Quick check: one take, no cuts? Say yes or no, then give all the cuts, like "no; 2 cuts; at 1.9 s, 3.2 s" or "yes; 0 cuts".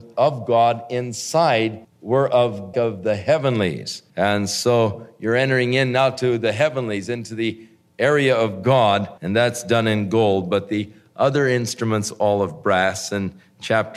no; 4 cuts; at 1.8 s, 2.7 s, 4.1 s, 9.2 s